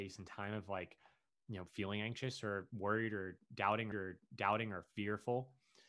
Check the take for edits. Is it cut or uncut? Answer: cut